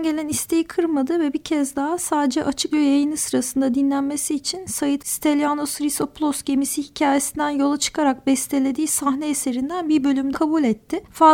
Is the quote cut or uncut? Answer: cut